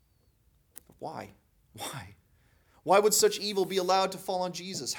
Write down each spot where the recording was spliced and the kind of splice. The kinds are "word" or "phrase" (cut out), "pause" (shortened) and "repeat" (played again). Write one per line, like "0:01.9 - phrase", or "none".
none